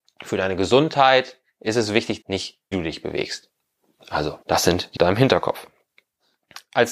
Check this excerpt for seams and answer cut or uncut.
cut